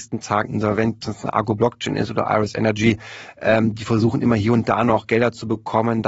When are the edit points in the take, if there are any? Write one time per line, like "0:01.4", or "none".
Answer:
0:01.0

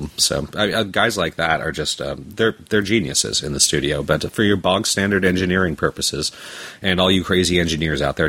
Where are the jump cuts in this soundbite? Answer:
none

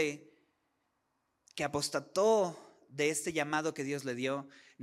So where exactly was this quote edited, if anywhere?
none

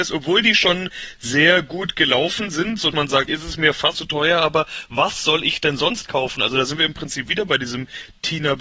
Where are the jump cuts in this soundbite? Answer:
0:02.9
0:03.3
0:03.9

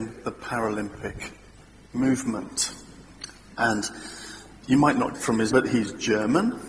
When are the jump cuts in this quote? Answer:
0:04.5
0:05.1
0:05.5

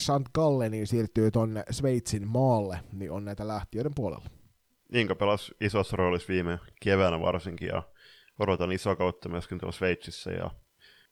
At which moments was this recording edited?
none

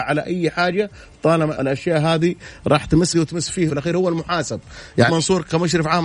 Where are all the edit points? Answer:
0:01.5
0:03.1
0:03.7
0:05.1

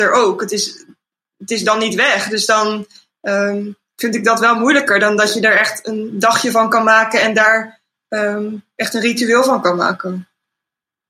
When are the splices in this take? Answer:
none

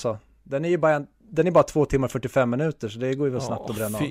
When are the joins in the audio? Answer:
none

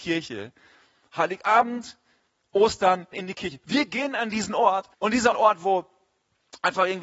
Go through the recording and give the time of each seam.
0:03.1
0:04.9
0:05.3

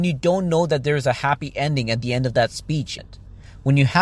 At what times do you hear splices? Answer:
0:03.0

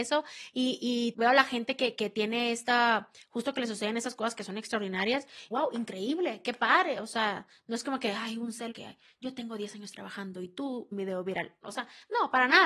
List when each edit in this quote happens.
0:01.1
0:01.9
0:05.5
0:08.7
0:10.9

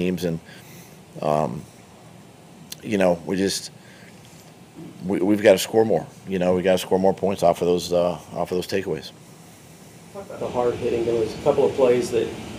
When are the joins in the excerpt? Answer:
none

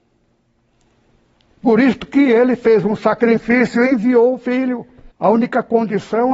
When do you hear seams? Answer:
0:05.1

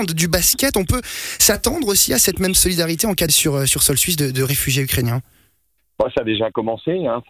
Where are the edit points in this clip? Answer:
0:03.3

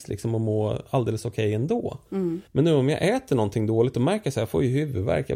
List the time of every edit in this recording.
0:02.5

